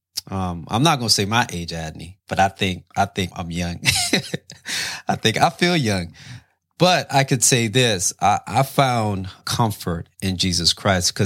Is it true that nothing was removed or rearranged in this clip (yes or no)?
no